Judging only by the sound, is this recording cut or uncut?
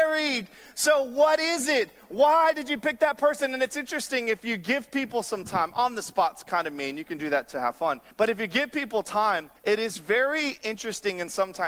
cut